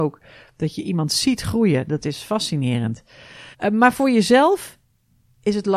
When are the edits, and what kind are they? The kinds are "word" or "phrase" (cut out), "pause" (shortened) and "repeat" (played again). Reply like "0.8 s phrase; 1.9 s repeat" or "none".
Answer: 3.5 s pause